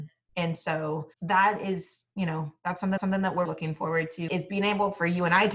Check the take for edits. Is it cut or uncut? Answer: cut